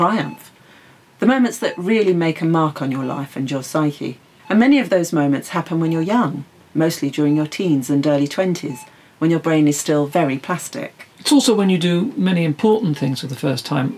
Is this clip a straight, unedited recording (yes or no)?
yes